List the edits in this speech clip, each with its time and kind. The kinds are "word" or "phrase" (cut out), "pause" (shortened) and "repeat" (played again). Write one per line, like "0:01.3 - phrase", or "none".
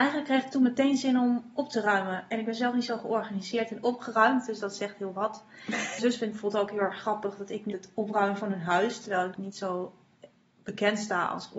0:06.0 - phrase
0:07.7 - phrase
0:09.3 - phrase